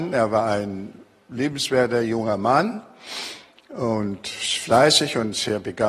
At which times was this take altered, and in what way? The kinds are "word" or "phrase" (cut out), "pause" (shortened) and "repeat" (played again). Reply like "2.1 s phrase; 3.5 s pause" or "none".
none